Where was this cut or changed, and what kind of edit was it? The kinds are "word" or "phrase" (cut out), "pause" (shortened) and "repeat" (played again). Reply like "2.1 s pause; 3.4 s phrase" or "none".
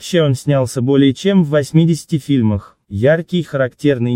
2.8 s pause